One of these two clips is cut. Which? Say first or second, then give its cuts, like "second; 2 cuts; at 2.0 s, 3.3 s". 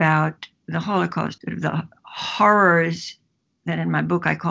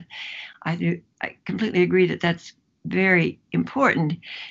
first; 1 cut; at 1.4 s